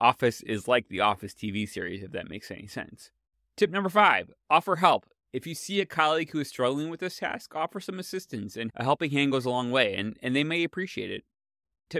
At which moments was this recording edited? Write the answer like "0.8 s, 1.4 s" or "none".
3.3 s